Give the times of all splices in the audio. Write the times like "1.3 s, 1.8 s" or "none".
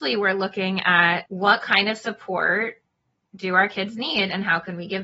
1.3 s